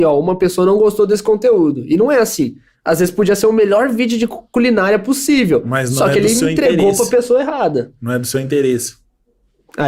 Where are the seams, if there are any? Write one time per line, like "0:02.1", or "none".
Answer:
none